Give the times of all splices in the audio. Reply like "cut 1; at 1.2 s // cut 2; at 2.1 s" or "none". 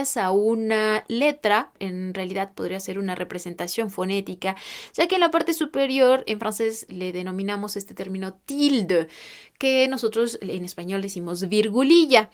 cut 1; at 6.9 s